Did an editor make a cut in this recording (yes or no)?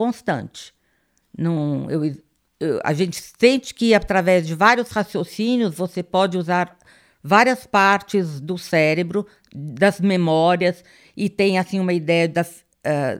no